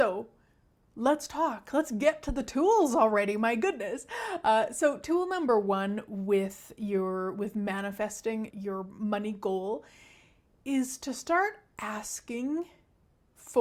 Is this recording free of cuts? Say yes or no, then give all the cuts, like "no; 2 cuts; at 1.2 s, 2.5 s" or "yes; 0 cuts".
no; 1 cut; at 8.5 s